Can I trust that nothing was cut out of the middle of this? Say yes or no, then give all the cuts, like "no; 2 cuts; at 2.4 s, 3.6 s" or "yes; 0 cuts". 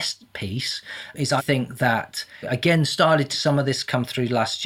no; 3 cuts; at 1.4 s, 2.4 s, 3.3 s